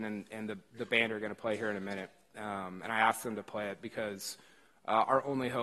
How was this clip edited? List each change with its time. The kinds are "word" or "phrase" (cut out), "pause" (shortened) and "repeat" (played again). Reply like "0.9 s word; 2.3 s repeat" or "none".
none